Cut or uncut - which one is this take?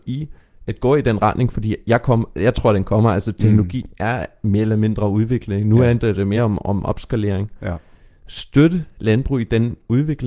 uncut